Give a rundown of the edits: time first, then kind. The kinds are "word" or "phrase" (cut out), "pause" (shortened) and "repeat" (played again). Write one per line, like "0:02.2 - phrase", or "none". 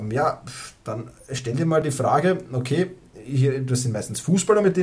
none